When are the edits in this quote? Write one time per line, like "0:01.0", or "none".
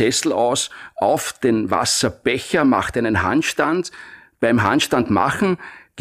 none

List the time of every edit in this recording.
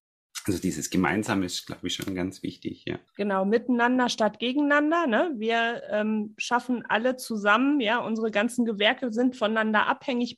0:03.1

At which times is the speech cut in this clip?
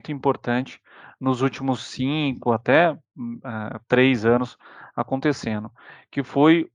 none

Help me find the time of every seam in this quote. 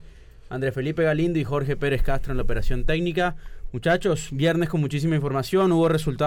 none

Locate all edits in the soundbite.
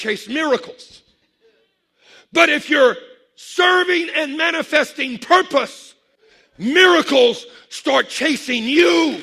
none

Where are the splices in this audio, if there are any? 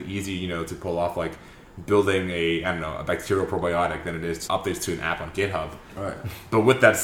0:04.5

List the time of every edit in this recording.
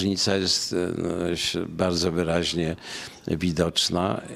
none

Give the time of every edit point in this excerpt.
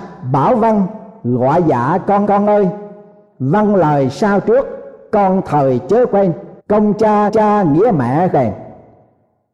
0:02.2
0:06.6
0:07.3
0:08.3

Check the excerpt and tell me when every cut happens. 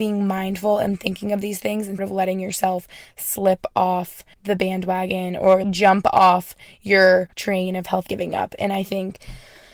0:02.0
0:04.3
0:05.6
0:07.3
0:08.1

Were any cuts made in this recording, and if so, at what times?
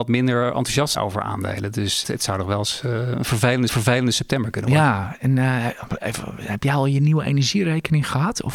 0:00.9
0:02.0
0:03.7
0:06.0

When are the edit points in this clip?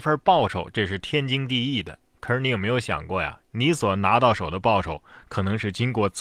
none

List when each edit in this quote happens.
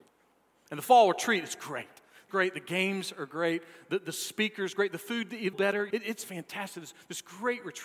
0:02.3
0:05.5
0:05.9

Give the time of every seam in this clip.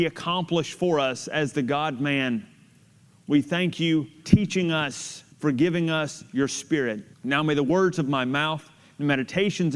0:04.2
0:05.3
0:07.1

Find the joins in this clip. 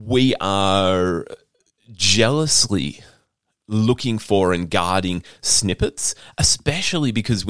none

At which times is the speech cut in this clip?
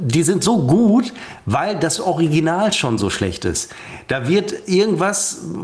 none

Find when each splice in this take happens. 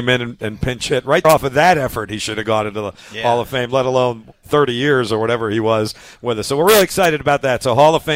0:01.2

